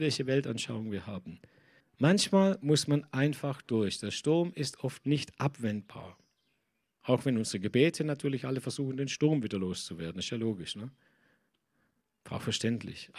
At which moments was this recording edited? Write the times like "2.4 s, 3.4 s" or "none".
1.8 s